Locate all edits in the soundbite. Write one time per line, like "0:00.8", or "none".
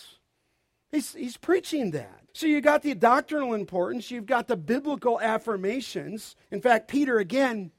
0:02.3
0:06.4